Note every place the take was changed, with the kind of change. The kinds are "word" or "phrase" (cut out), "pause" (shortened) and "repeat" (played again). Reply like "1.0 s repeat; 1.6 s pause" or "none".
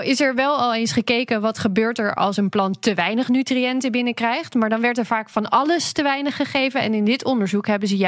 none